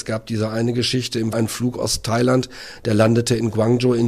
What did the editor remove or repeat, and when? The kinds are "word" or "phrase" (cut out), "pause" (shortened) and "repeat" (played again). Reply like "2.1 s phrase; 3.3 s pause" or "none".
1.3 s word